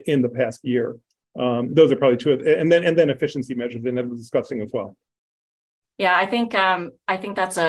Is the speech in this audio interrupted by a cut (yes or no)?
no